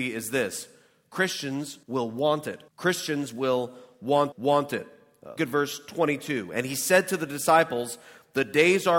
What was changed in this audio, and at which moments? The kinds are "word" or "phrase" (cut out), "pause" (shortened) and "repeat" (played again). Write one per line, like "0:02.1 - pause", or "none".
0:01.8 - pause
0:02.7 - pause
0:04.3 - repeat
0:05.4 - word